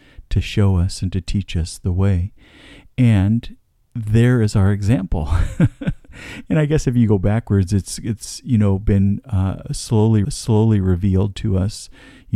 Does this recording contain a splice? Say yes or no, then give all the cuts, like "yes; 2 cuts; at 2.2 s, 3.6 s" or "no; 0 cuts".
yes; 2 cuts; at 3.7 s, 10.2 s